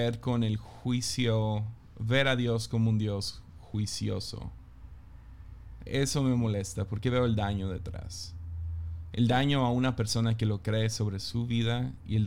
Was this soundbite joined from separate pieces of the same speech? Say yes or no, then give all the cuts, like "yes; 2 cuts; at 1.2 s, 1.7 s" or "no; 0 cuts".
yes; 1 cut; at 5.9 s